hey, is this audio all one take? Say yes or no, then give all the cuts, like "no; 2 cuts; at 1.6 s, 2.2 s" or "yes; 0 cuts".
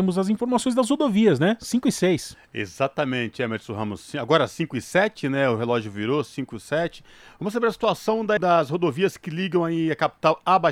no; 1 cut; at 8.4 s